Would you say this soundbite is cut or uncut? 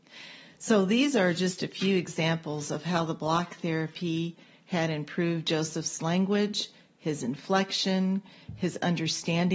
uncut